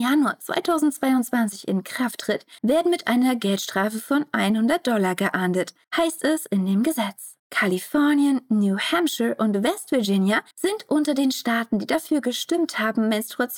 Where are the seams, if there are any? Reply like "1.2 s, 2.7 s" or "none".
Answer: 2.6 s, 5.8 s, 7.4 s, 10.5 s